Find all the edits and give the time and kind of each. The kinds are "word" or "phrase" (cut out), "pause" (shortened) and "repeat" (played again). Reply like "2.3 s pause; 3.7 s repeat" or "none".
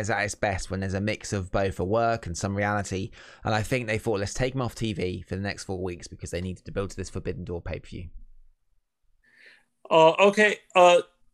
none